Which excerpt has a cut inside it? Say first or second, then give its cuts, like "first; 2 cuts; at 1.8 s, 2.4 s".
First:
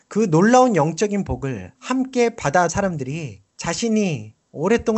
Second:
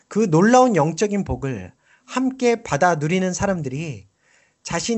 first; 3 cuts; at 1.7 s, 2.7 s, 3.5 s